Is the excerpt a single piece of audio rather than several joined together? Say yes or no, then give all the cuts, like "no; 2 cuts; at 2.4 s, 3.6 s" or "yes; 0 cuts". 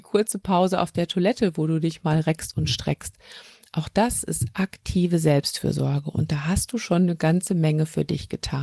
yes; 0 cuts